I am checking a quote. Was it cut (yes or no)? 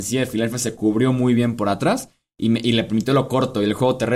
no